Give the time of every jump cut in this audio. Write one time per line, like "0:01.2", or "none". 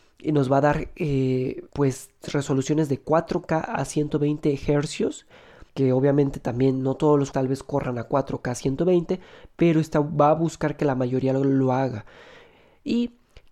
0:01.7
0:05.7
0:07.3